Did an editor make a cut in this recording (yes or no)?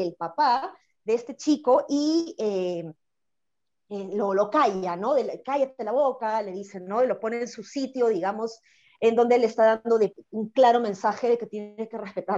no